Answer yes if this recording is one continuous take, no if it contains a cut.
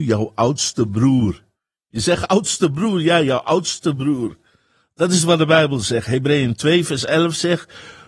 yes